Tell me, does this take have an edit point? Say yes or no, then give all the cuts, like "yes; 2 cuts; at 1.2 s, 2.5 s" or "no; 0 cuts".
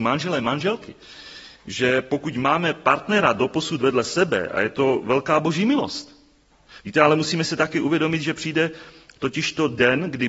no; 0 cuts